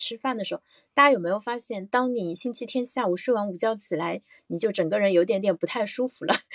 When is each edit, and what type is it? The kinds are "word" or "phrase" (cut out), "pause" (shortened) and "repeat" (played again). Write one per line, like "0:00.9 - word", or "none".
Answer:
none